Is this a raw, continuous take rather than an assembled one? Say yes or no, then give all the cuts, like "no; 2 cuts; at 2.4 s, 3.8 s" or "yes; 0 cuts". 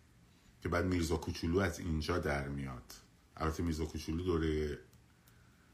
no; 1 cut; at 3.2 s